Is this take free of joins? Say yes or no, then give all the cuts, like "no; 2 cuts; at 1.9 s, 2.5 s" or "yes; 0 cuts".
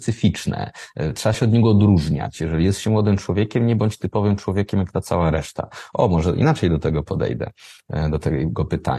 yes; 0 cuts